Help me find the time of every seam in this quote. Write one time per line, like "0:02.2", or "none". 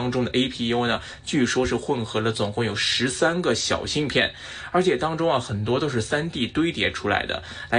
none